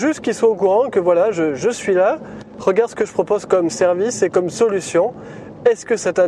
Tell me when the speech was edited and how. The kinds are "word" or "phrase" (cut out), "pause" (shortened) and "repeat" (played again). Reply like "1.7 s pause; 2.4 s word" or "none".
none